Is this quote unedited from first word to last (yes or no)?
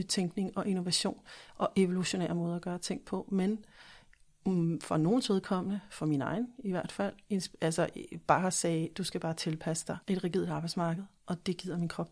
no